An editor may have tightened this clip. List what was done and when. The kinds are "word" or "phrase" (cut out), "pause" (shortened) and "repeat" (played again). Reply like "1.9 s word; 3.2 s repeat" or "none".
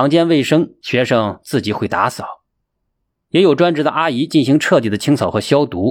none